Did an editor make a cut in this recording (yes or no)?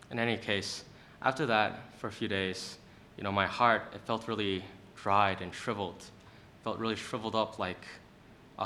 no